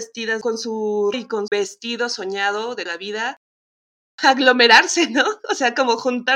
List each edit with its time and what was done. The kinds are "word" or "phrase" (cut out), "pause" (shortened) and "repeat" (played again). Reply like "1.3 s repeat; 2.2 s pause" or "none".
1.1 s word; 1.5 s word; 2.9 s word

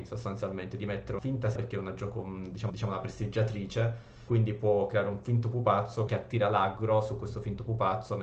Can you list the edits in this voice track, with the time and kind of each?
1.2 s word; 1.6 s word; 2.7 s repeat; 4.3 s word; 6.1 s word

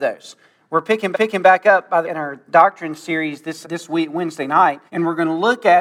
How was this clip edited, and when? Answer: 1.1 s repeat; 2.0 s word; 2.5 s pause; 3.6 s word; 4.9 s pause

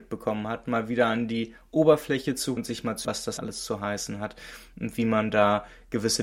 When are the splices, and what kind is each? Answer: 2.6 s word; 3.0 s word; 3.4 s word

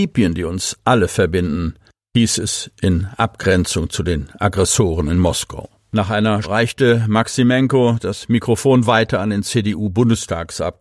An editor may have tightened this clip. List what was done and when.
6.4 s word

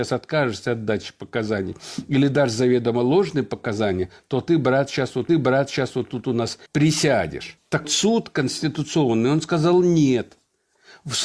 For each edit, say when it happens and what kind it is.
5.3 s repeat; 6.7 s pause; 7.8 s word

